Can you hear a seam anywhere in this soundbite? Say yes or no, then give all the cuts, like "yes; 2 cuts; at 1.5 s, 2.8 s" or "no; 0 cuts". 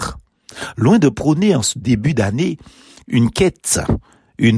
no; 0 cuts